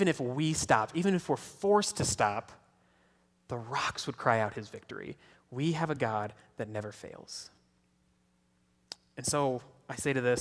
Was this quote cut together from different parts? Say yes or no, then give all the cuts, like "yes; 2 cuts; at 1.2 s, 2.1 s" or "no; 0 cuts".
no; 0 cuts